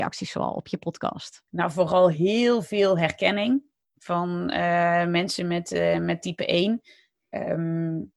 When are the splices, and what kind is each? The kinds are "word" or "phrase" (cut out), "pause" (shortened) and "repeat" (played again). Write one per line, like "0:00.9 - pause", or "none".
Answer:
0:01.5 - pause

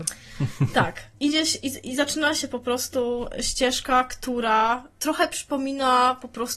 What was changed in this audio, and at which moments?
0:01.1 - pause
0:04.9 - pause

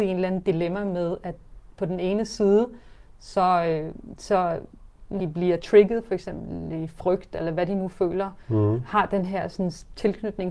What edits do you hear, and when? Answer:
0:05.2 - word

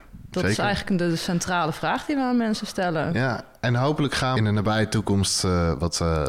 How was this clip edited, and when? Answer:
0:04.4 - phrase

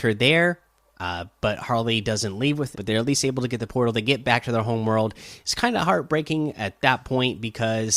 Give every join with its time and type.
0:02.7 - word

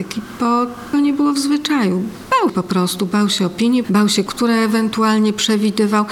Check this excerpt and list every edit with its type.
0:00.9 - word
0:02.5 - word
0:03.8 - word
0:04.3 - word

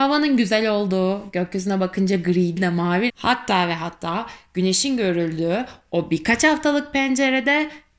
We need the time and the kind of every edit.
0:02.6 - word
0:03.1 - phrase

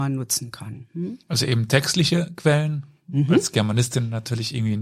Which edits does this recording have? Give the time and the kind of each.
0:01.2 - pause

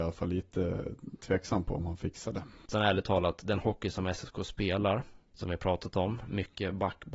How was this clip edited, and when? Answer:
none

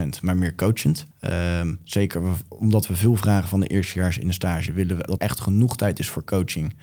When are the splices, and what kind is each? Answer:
0:01.1 - pause
0:05.2 - word

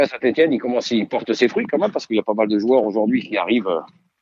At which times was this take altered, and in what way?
none

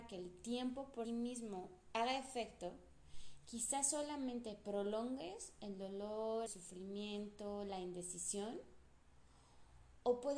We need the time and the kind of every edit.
0:01.0 - word
0:06.5 - word

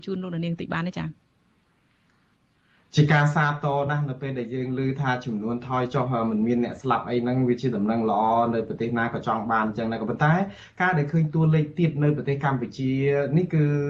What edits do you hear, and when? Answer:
none

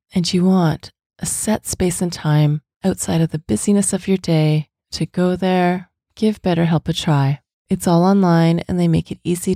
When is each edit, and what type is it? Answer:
none

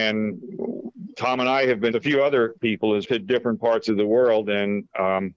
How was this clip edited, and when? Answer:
0:01.9 - phrase
0:02.6 - word
0:03.0 - word

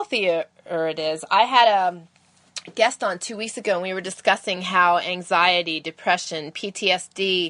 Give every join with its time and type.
none

